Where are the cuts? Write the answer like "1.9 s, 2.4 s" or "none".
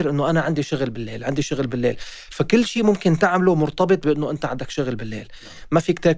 none